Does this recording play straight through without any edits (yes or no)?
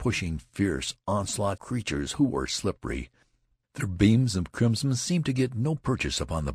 no